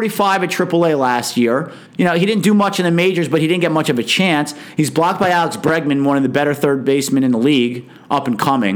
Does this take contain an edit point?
yes; 1 cut; at 1.9 s

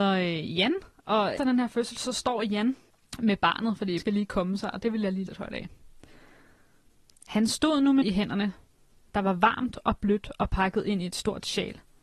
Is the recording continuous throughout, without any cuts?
no; 4 cuts; at 1.4 s, 4.0 s, 5.3 s, 8.0 s

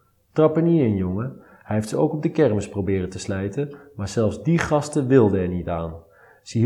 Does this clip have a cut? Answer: no; 0 cuts

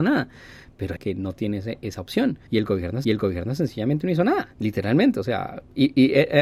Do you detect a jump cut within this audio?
yes; 4 cuts; at 1.0 s, 2.5 s, 3.0 s, 4.5 s

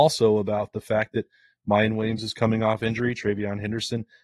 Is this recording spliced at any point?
no; 0 cuts

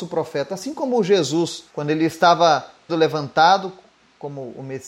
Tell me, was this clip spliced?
yes; 2 cuts; at 1.7 s, 2.9 s

